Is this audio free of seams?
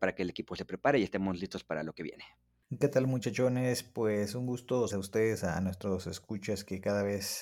no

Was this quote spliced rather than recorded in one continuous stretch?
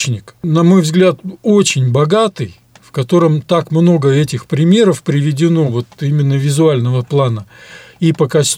no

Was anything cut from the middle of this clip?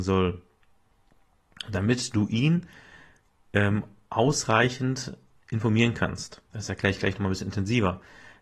yes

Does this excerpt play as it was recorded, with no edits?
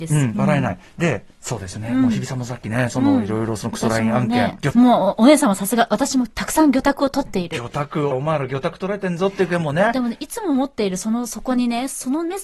no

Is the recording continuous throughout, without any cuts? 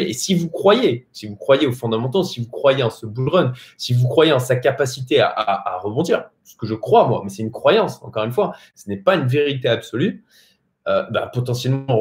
yes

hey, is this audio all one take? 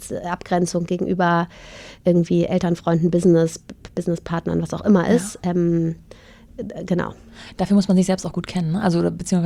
yes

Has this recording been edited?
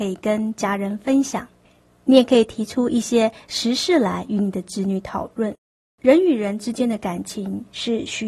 yes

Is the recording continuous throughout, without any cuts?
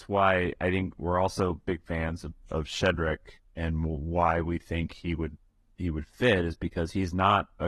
yes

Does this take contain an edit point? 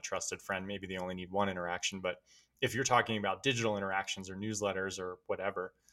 no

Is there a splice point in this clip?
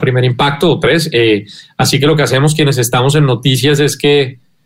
no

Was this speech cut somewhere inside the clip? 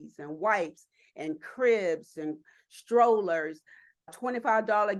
yes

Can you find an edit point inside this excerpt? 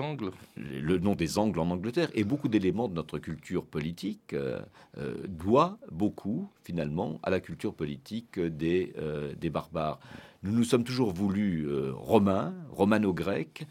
no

